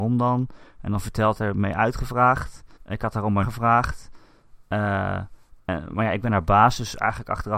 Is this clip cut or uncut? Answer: cut